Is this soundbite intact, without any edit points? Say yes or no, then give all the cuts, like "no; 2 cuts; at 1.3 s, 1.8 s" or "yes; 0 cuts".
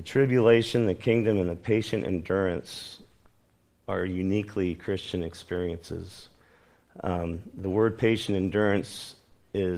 yes; 0 cuts